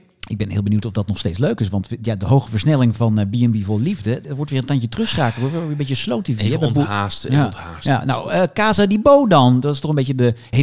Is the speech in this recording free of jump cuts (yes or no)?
yes